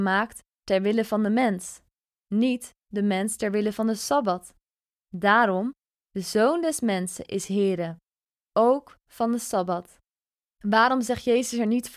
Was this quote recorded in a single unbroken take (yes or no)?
yes